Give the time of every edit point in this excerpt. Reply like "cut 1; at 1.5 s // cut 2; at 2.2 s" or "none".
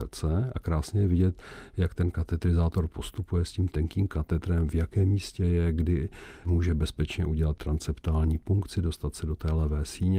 none